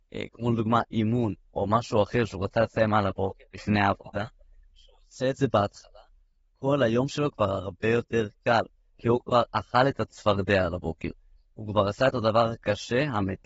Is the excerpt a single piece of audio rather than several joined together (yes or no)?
yes